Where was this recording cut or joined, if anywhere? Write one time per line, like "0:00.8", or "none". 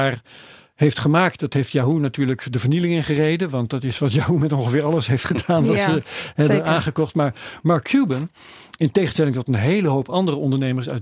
none